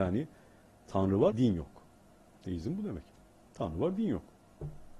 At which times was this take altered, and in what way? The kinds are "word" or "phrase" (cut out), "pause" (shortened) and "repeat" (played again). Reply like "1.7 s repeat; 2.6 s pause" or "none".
1.3 s word